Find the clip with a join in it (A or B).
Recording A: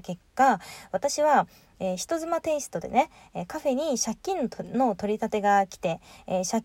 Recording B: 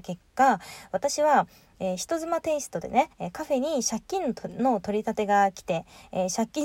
B